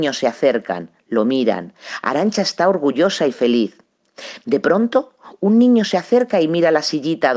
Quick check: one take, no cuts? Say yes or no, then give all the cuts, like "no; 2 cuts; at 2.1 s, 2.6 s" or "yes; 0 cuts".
yes; 0 cuts